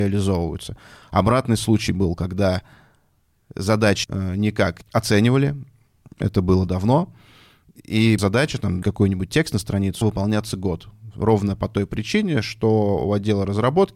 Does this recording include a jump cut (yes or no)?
yes